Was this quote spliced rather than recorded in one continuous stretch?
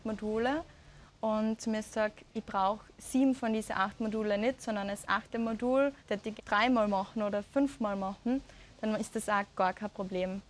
yes; 4 cuts; at 1.6 s, 2.3 s, 6.0 s, 6.4 s

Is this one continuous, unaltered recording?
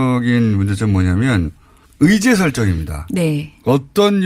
no; 1 cut; at 1.8 s

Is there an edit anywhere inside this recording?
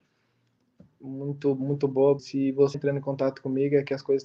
yes; 2 cuts; at 2.2 s, 2.7 s

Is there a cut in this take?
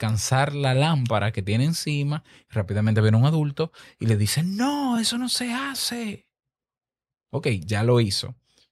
no; 0 cuts

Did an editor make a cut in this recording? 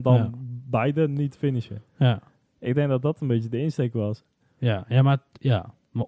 no; 0 cuts

